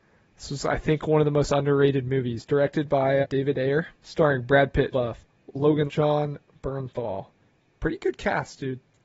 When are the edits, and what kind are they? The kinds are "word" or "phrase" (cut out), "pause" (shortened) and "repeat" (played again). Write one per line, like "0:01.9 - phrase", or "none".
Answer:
0:03.2 - word
0:03.9 - pause
0:04.9 - word
0:05.9 - word